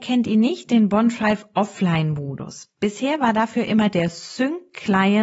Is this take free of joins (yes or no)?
yes